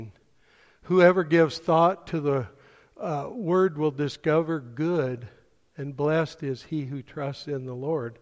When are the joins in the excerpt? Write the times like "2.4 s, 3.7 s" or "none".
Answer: none